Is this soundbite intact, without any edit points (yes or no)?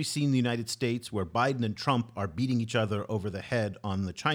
yes